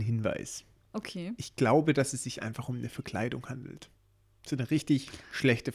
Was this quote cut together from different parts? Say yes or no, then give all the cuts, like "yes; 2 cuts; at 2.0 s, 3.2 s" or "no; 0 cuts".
no; 0 cuts